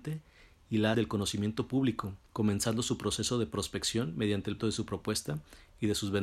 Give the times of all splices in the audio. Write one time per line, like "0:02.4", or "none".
0:00.9
0:02.3
0:04.6